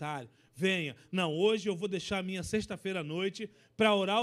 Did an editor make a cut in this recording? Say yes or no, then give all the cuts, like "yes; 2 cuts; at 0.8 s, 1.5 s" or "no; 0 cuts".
no; 0 cuts